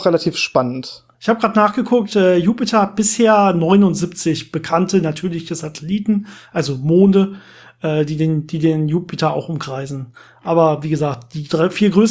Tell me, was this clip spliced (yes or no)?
yes